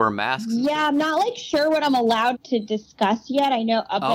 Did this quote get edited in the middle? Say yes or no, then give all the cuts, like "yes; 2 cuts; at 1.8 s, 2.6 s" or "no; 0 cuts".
yes; 1 cut; at 2.3 s